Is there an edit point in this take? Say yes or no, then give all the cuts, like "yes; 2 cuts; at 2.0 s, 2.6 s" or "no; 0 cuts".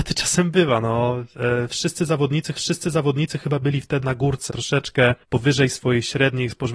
yes; 4 cuts; at 2.5 s, 4.0 s, 4.5 s, 5.2 s